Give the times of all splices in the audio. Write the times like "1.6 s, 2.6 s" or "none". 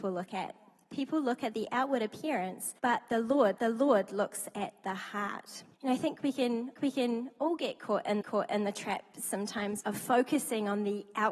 2.8 s, 3.6 s, 5.7 s, 6.8 s, 8.2 s, 9.8 s

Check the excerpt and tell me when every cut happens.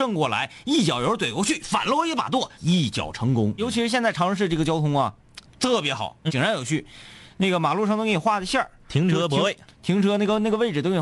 2.5 s, 3.6 s, 5.5 s, 6.3 s

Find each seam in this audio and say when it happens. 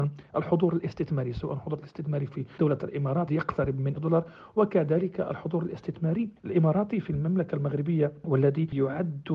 3.3 s, 4.0 s, 6.4 s

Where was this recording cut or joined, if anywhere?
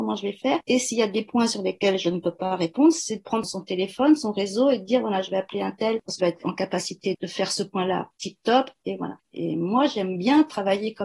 6.2 s

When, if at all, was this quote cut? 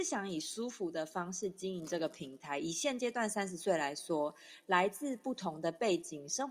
none

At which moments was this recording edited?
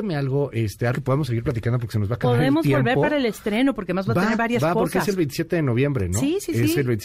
0.9 s

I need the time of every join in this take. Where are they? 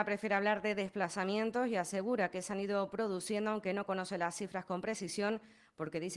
none

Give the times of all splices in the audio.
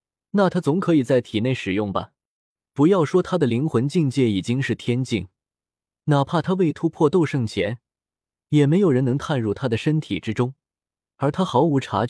none

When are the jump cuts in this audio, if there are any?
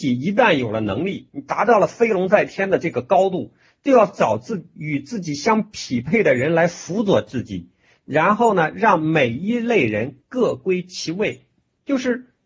none

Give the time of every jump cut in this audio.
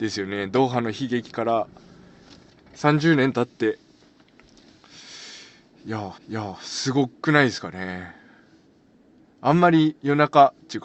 6.1 s

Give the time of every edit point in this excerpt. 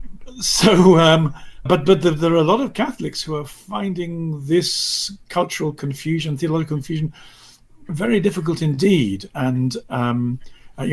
1.7 s, 7.9 s

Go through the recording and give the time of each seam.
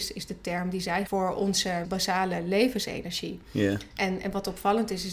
1.1 s, 1.8 s

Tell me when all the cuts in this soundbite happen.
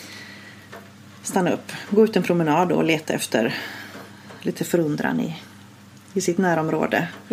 none

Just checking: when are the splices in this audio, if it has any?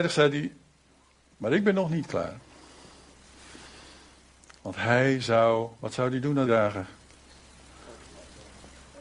6.5 s

